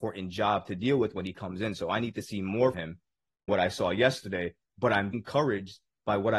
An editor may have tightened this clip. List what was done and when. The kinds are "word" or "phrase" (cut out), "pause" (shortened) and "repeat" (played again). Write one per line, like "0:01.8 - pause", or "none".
0:02.7 - word
0:03.5 - word
0:05.1 - word